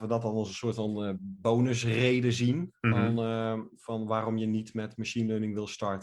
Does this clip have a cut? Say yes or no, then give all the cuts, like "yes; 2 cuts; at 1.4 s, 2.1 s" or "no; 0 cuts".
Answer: no; 0 cuts